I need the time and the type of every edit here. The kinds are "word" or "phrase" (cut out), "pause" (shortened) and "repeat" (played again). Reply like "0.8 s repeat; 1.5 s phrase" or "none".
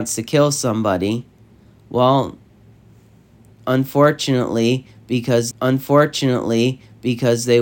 5.5 s repeat